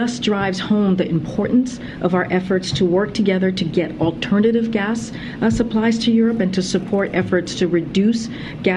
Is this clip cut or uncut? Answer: uncut